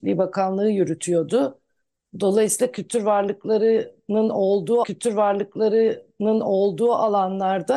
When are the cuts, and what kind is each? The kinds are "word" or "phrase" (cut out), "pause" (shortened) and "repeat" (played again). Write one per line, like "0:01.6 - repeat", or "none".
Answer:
0:04.8 - repeat